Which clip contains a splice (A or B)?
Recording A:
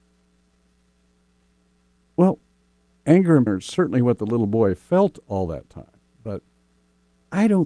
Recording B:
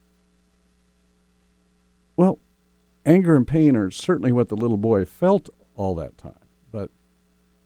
A